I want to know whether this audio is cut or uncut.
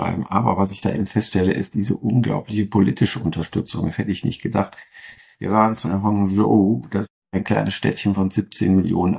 cut